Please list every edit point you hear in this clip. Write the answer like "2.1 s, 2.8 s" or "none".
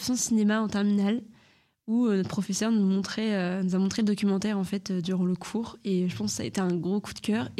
none